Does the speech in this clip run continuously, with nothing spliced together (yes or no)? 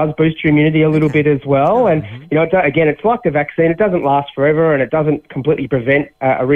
yes